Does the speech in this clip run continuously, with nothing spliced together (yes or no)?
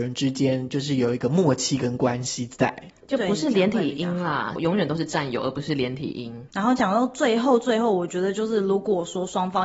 no